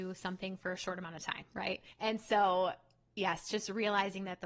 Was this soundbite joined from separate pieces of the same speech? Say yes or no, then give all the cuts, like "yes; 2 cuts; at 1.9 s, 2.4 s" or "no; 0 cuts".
yes; 1 cut; at 1.9 s